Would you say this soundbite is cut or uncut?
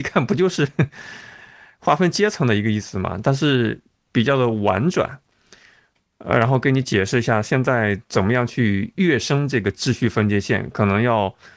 uncut